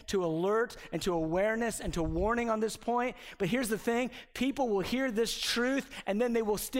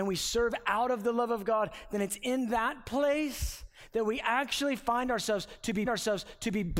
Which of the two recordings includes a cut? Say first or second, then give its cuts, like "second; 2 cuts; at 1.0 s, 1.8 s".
second; 1 cut; at 5.9 s